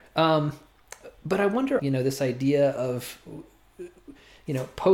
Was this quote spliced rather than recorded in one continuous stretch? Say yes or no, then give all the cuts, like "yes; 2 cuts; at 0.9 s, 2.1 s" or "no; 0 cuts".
yes; 1 cut; at 1.8 s